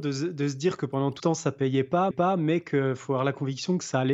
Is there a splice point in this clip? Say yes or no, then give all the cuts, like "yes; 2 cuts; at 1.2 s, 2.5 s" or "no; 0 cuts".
yes; 2 cuts; at 1.2 s, 2.1 s